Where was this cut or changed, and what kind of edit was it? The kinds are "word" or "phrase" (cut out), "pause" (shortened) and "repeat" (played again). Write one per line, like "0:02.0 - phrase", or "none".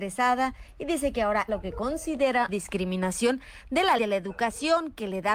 0:01.5 - word
0:02.5 - word
0:04.0 - word